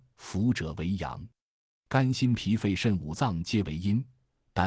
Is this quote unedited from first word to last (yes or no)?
yes